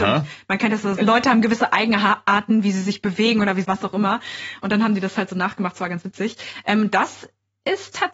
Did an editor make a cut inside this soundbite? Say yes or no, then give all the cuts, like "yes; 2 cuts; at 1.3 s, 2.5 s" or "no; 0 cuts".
yes; 2 cuts; at 1.0 s, 3.6 s